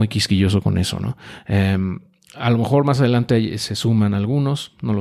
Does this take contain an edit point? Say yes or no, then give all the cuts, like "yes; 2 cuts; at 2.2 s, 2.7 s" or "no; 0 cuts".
no; 0 cuts